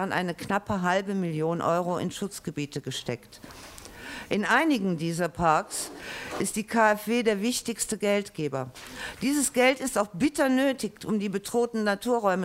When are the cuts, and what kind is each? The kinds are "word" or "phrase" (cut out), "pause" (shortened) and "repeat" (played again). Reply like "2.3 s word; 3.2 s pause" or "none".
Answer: none